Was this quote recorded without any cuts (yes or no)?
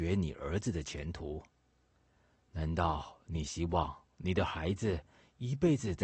yes